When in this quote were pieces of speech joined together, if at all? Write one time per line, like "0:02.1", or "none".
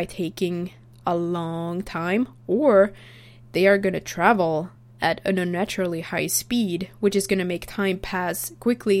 none